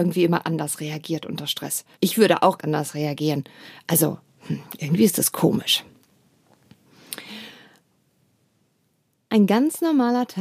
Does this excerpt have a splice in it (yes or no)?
yes